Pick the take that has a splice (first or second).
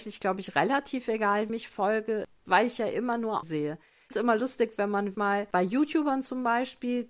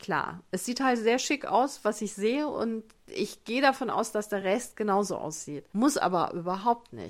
first